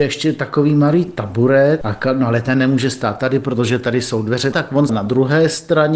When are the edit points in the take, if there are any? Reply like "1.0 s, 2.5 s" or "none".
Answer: 1.8 s, 4.5 s, 4.9 s